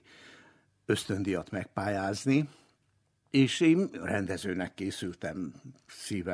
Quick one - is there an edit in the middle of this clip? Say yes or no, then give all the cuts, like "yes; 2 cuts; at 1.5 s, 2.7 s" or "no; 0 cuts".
no; 0 cuts